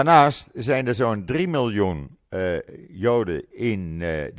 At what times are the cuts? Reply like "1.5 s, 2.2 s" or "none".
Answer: 2.2 s